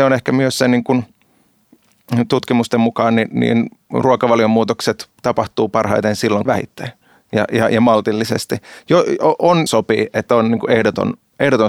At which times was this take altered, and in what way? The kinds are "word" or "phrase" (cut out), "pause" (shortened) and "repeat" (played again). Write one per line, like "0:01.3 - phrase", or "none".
0:05.2 - pause
0:06.4 - phrase
0:09.7 - phrase